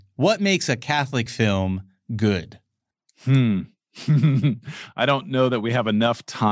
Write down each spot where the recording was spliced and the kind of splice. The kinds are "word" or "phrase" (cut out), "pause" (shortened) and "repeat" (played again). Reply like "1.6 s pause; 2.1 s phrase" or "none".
none